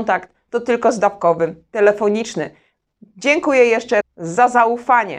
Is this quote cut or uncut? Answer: cut